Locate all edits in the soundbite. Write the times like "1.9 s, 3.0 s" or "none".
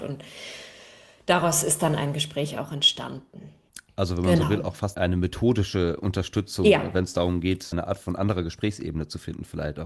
4.9 s, 7.7 s